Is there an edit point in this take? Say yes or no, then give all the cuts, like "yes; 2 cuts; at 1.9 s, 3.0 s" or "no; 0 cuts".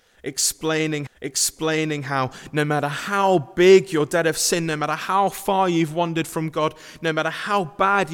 yes; 1 cut; at 1.1 s